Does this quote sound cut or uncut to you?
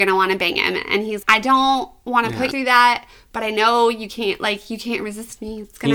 cut